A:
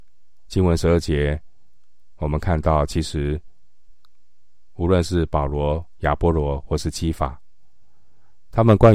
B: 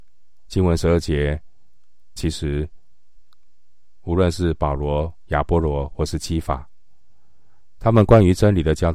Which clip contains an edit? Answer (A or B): B